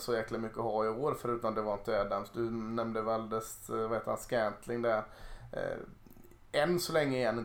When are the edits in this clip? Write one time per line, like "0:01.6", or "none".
none